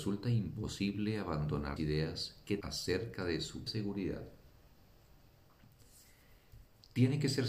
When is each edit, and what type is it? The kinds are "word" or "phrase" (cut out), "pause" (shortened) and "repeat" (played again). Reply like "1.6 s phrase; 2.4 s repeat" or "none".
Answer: 1.8 s word; 2.6 s word; 3.7 s word